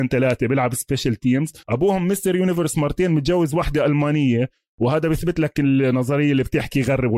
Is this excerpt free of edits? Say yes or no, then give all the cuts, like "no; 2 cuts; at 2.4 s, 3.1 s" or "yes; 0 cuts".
no; 1 cut; at 1.6 s